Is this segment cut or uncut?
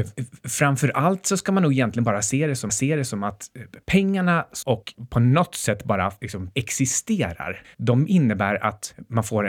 cut